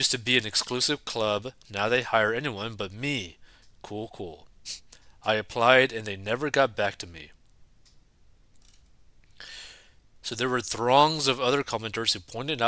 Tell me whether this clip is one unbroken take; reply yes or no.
yes